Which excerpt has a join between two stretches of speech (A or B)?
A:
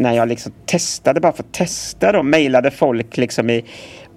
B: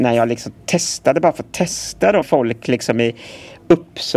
B